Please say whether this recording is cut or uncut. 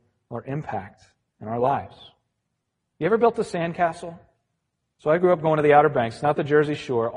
uncut